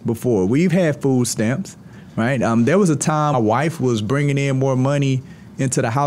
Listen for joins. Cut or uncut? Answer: cut